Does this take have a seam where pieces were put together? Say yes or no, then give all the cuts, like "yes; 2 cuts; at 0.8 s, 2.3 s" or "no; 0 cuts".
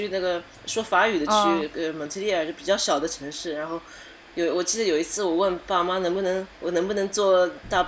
yes; 1 cut; at 6.5 s